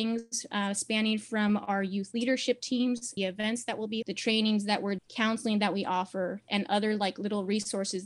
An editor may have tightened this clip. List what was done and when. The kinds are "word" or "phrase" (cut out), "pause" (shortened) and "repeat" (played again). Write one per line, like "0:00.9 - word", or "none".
0:03.2 - word
0:04.0 - word
0:05.0 - word